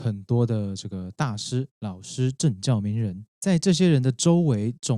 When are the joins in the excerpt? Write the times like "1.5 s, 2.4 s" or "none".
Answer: 3.3 s